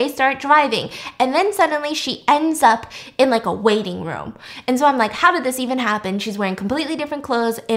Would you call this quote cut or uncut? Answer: uncut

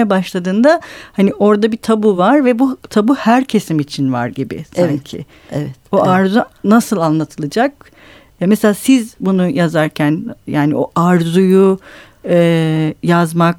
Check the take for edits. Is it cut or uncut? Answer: uncut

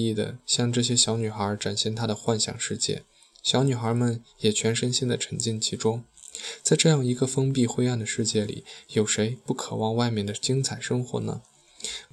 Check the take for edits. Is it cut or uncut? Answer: uncut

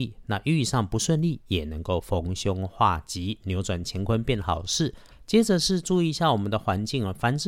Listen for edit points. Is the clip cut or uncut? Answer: uncut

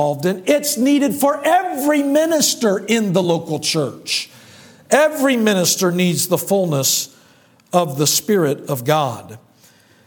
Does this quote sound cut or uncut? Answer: uncut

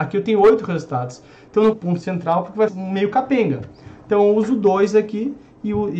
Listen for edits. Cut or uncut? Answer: cut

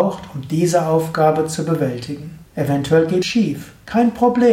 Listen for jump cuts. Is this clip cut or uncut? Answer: cut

